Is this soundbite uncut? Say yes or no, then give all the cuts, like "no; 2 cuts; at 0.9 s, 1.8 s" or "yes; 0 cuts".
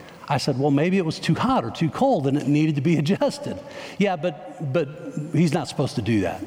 yes; 0 cuts